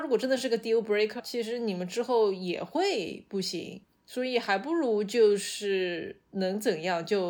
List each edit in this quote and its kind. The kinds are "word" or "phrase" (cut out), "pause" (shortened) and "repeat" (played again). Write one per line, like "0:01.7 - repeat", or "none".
0:01.2 - phrase